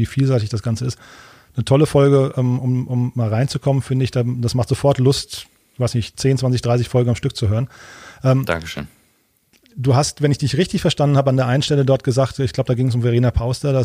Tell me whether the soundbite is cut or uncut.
uncut